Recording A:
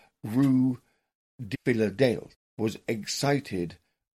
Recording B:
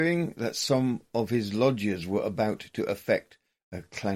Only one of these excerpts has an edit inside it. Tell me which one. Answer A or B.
A